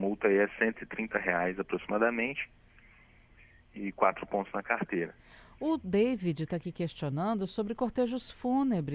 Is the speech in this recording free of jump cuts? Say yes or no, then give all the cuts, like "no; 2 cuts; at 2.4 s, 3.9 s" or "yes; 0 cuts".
yes; 0 cuts